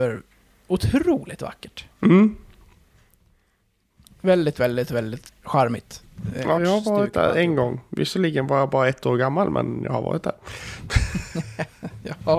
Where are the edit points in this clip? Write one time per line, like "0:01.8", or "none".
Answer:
0:05.3
0:06.6